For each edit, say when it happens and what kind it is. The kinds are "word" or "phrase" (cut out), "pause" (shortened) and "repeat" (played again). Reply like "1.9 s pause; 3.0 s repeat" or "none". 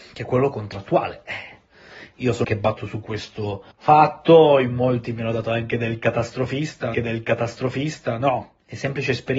2.4 s word; 3.7 s pause; 6.9 s repeat